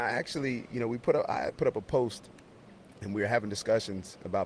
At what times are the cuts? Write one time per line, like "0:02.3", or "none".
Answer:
0:01.5